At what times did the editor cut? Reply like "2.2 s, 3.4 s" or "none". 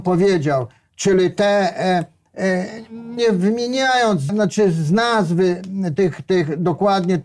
3.2 s, 4.3 s, 6.0 s